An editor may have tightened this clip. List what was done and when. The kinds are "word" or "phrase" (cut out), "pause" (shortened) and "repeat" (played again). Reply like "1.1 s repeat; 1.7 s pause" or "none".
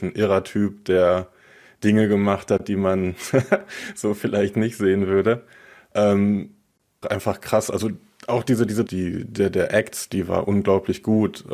7.0 s word; 8.9 s word